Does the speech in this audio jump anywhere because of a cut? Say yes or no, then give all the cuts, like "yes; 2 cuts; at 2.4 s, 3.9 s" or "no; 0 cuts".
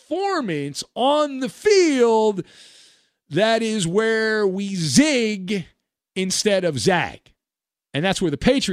no; 0 cuts